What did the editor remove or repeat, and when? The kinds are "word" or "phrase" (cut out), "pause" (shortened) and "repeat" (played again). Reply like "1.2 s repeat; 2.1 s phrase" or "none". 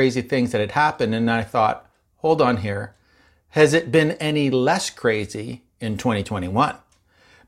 none